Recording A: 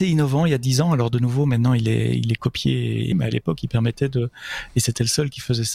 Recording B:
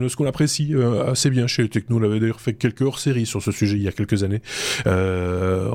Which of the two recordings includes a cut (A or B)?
A